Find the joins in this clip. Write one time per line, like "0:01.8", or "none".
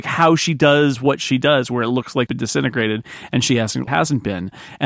0:02.3
0:03.9